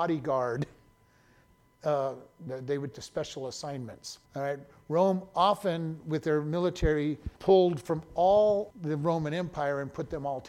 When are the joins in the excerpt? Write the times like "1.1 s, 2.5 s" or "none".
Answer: 2.5 s, 2.9 s, 4.3 s, 7.4 s, 8.7 s